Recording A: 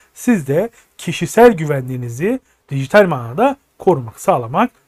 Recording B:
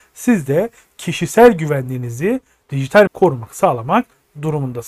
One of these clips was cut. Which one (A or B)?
B